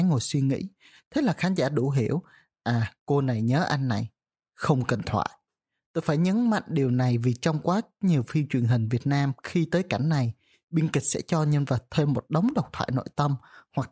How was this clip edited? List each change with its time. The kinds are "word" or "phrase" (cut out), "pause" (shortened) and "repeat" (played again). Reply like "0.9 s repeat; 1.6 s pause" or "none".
none